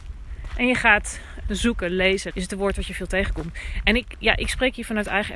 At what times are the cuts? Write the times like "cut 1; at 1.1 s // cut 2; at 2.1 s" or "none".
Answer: cut 1; at 1.4 s // cut 2; at 2.3 s